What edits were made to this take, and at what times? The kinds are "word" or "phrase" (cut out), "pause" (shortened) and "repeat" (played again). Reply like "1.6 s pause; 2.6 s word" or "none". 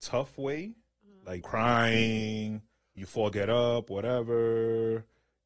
1.4 s word; 3.0 s word; 3.3 s word